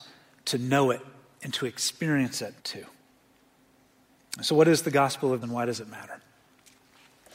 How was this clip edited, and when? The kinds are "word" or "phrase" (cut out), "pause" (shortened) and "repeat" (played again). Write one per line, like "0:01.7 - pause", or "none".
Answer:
0:02.6 - pause
0:05.4 - word

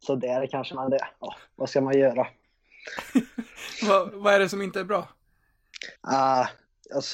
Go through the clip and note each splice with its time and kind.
0:06.0 - pause

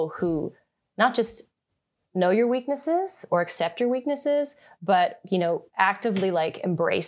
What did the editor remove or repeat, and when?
none

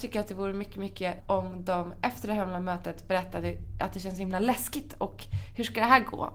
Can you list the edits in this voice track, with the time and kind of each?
0:01.2 - word

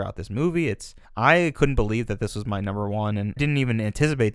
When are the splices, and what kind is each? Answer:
0:01.0 - pause
0:03.4 - word

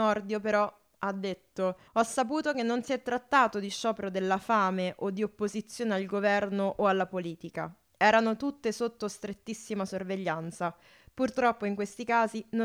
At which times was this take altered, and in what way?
0:01.9 - pause

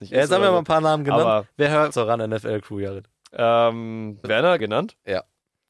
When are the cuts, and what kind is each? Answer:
0:01.9 - phrase
0:04.2 - phrase
0:04.6 - word

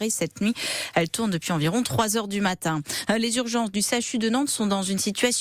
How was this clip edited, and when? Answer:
none

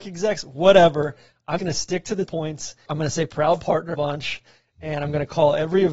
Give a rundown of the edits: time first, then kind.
0:01.6 - word
0:02.3 - word
0:02.9 - word
0:03.9 - word

